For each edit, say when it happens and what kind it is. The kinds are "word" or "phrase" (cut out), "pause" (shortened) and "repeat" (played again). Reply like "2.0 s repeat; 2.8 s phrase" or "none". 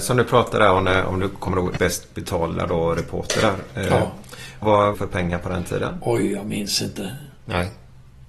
1.8 s phrase; 4.6 s word; 4.9 s phrase